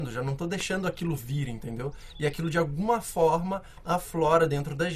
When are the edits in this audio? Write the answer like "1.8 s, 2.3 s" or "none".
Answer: none